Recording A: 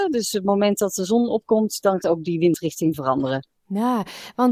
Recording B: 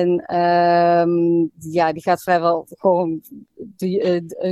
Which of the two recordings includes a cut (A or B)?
A